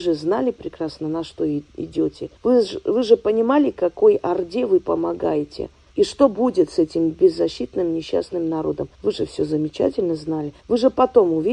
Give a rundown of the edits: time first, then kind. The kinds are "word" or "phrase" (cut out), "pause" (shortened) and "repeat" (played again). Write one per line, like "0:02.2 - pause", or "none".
0:02.4 - pause
0:05.9 - pause
0:08.9 - pause
0:10.6 - pause